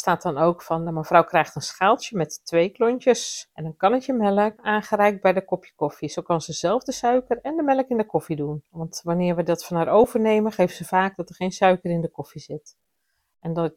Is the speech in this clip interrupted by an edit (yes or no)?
no